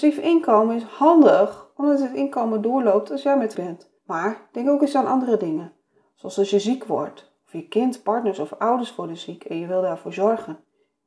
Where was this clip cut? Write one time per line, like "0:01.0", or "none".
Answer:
0:03.5
0:04.0